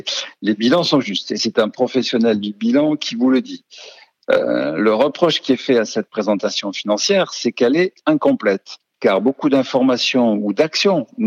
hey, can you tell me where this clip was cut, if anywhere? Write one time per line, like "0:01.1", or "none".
none